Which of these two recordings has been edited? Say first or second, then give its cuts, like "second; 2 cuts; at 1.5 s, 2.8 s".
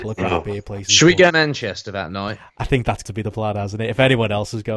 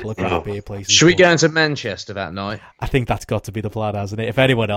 first; 2 cuts; at 1.3 s, 3.0 s